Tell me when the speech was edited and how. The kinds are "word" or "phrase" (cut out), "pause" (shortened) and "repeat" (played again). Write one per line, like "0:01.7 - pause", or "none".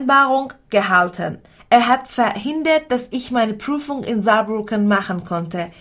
none